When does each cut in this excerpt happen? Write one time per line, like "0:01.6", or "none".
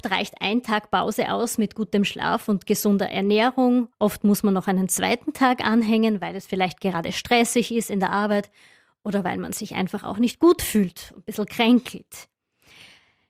none